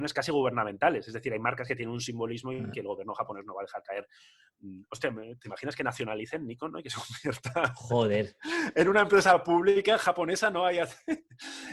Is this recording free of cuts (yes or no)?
yes